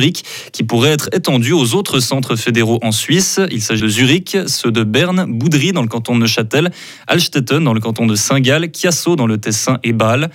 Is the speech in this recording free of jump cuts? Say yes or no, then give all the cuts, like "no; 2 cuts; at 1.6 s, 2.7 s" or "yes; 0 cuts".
no; 1 cut; at 3.8 s